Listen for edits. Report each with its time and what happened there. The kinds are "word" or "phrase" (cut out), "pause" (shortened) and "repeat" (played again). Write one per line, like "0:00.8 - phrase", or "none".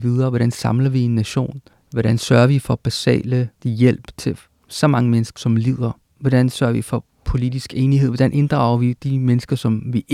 0:03.6 - word
0:05.4 - word